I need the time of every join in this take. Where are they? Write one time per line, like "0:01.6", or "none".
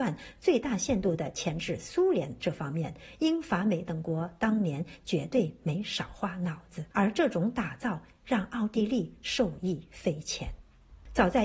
0:06.9